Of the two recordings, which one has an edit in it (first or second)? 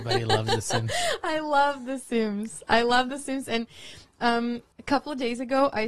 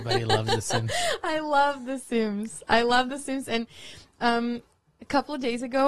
first